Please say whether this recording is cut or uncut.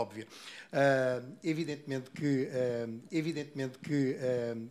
cut